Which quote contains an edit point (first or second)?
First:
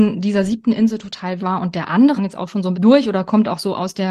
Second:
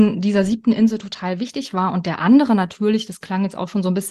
first